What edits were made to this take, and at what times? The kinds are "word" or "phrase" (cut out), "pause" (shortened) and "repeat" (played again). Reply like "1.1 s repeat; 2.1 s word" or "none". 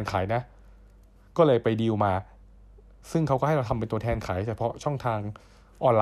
none